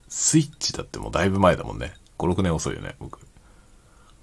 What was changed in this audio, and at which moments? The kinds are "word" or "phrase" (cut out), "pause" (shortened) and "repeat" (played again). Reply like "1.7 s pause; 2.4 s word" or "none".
2.0 s pause